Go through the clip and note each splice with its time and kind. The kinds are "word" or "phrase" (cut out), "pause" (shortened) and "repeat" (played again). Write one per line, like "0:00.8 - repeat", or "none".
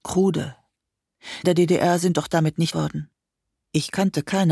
0:01.4 - phrase
0:02.7 - word